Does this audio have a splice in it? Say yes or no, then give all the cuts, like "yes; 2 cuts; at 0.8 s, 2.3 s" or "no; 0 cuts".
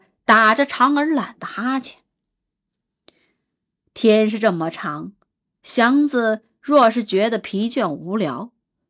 no; 0 cuts